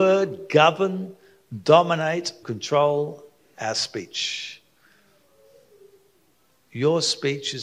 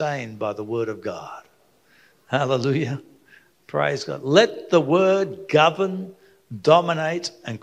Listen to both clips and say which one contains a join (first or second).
first